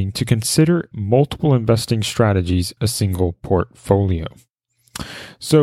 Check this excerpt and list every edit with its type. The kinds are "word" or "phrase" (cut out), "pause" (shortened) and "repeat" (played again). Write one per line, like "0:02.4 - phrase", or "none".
0:00.9 - word
0:02.8 - word